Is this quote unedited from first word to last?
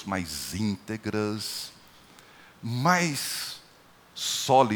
yes; 0 cuts

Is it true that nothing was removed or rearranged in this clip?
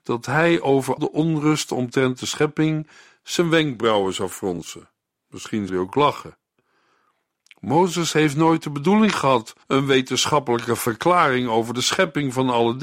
no; 3 cuts; at 1.0 s, 5.7 s, 9.6 s

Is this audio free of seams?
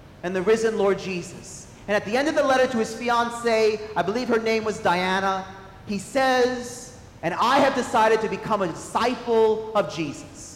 yes; 0 cuts

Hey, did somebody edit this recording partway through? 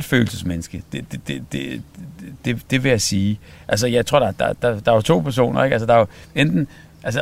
no; 0 cuts

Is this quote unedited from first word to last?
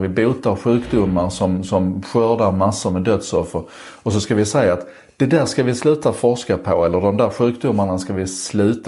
yes; 0 cuts

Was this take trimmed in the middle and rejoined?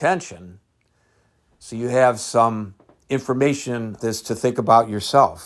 yes; 1 cut; at 4.0 s

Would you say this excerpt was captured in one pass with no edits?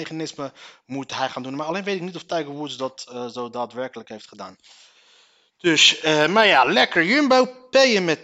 yes; 0 cuts

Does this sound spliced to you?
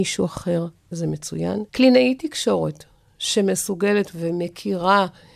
yes; 2 cuts; at 1.7 s, 4.1 s

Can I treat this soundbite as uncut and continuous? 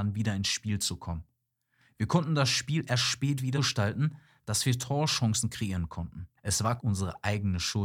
no; 3 cuts; at 3.5 s, 6.4 s, 6.8 s

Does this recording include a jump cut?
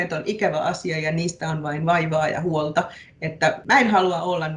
no; 0 cuts

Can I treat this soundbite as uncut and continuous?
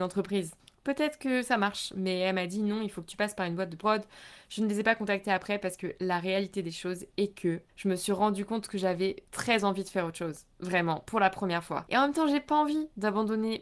yes; 0 cuts

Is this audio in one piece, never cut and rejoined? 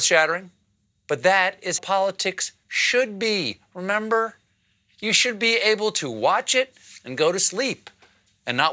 no; 1 cut; at 1.8 s

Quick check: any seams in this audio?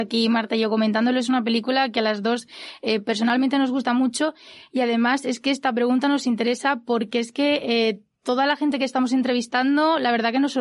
no; 0 cuts

